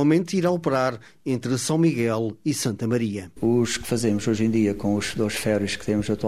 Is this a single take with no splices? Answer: yes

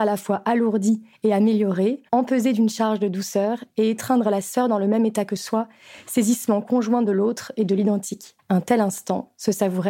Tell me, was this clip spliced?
yes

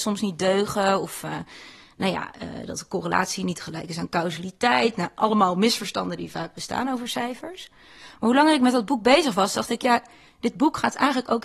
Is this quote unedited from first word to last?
yes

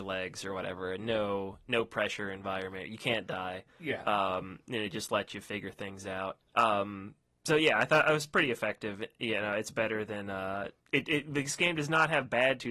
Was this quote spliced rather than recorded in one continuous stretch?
yes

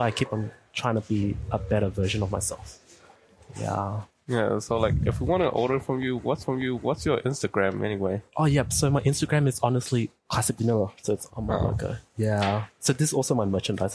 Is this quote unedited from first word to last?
no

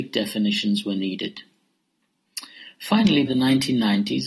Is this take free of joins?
no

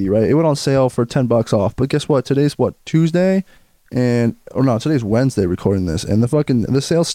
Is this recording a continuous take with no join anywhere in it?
yes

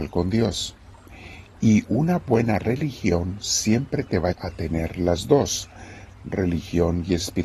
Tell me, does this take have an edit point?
yes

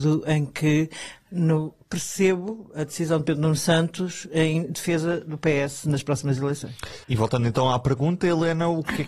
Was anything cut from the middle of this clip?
yes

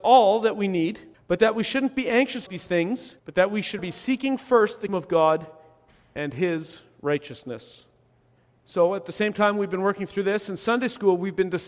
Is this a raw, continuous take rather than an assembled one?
no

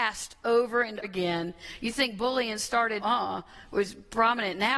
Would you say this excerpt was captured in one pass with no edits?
no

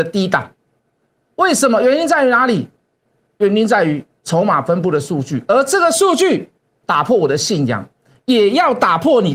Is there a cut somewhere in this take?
no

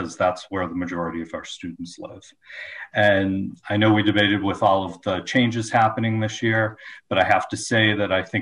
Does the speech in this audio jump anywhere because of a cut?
no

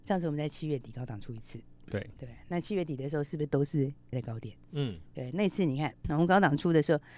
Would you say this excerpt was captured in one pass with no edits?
no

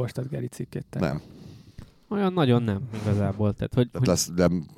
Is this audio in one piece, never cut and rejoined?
yes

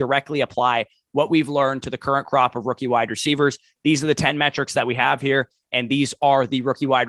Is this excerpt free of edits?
yes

